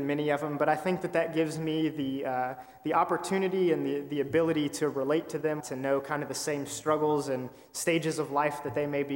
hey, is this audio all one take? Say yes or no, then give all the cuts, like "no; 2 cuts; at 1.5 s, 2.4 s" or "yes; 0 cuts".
no; 1 cut; at 5.6 s